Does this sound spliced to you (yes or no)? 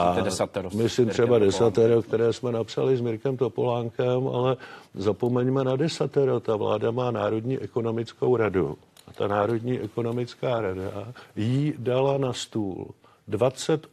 no